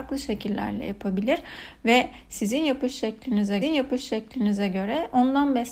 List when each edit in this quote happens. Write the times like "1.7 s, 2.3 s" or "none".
3.6 s